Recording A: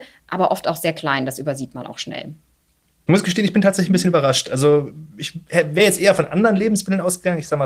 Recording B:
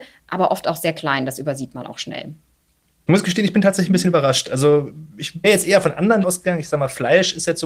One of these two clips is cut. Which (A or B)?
B